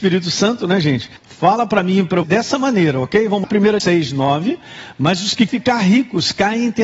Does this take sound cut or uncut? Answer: cut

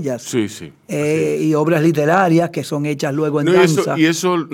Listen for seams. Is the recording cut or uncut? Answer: uncut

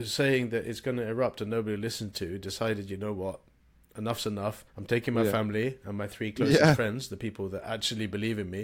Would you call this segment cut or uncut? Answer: cut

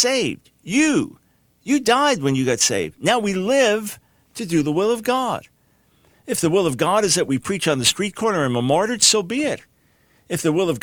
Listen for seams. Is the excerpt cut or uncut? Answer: uncut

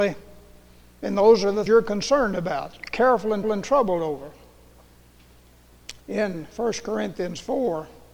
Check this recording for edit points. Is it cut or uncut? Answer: cut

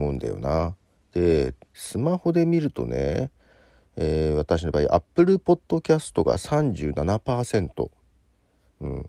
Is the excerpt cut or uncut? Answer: uncut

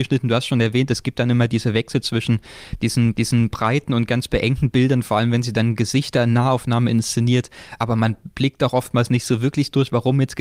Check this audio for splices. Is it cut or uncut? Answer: cut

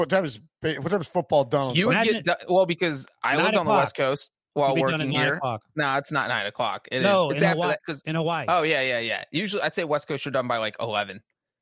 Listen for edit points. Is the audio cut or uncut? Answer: uncut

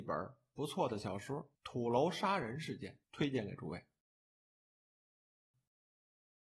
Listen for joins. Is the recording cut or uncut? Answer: cut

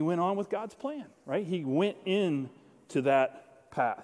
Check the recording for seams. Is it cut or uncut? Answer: uncut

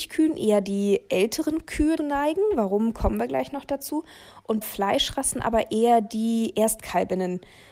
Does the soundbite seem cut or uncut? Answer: cut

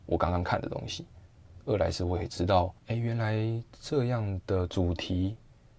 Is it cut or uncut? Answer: cut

